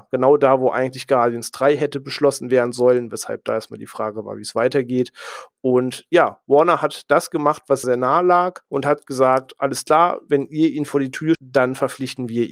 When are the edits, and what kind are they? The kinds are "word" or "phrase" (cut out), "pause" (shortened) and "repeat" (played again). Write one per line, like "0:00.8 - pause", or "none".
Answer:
0:07.8 - word
0:08.6 - pause
0:11.3 - word